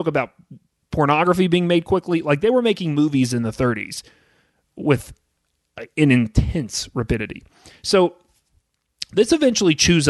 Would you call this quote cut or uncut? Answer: uncut